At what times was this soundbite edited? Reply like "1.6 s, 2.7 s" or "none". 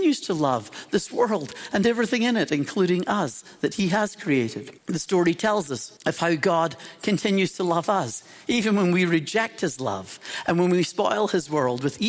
4.8 s, 6.0 s